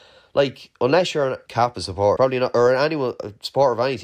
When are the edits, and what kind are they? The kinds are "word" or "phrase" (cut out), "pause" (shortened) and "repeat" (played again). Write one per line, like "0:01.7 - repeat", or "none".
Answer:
0:01.5 - word
0:02.2 - word